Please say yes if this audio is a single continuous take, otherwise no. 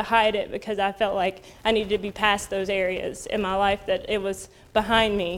yes